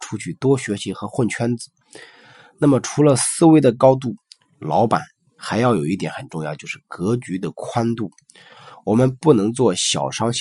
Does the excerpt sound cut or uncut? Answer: uncut